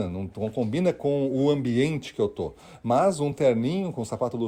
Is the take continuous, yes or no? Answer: yes